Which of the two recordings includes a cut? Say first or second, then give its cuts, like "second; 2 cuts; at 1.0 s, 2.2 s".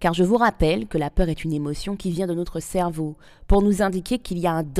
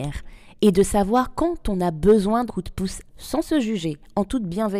second; 2 cuts; at 2.5 s, 3.1 s